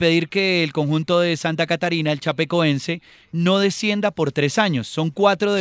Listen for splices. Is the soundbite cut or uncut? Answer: uncut